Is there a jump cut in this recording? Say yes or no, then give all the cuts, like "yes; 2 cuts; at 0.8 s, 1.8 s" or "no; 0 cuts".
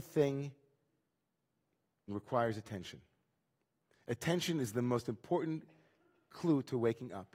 yes; 1 cut; at 2.1 s